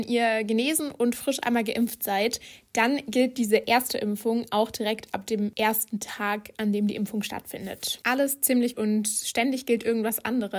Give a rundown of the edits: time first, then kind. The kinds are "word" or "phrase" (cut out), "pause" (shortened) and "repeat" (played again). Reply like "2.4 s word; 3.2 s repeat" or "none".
8.7 s word